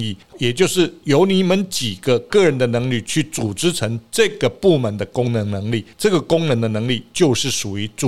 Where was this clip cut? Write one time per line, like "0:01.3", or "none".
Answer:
0:05.9